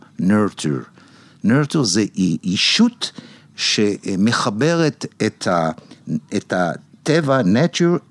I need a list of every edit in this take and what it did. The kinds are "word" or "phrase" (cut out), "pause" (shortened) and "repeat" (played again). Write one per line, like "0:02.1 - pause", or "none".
none